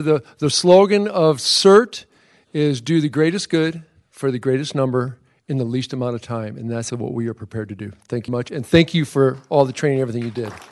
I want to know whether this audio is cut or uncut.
cut